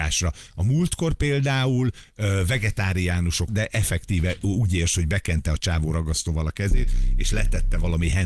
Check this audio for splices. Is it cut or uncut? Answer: cut